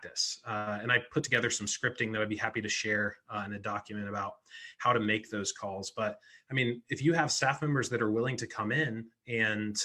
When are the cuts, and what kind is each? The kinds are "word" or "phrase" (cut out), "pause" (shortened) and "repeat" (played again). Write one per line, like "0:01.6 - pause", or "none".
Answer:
none